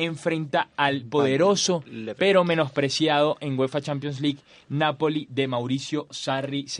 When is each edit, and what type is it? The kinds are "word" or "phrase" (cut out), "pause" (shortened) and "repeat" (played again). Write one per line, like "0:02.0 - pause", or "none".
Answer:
none